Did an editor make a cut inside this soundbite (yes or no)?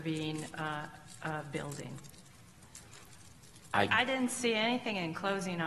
no